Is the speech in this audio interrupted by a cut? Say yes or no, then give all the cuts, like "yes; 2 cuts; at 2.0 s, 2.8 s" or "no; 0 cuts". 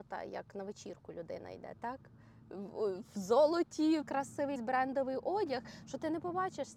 yes; 2 cuts; at 4.0 s, 4.6 s